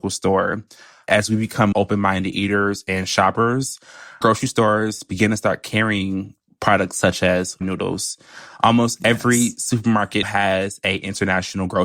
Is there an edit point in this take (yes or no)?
yes